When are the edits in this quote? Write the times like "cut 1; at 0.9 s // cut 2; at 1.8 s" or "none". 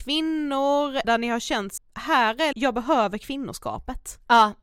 cut 1; at 1.0 s // cut 2; at 1.8 s // cut 3; at 2.5 s